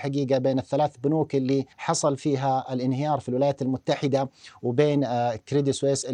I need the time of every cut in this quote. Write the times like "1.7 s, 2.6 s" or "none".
1.7 s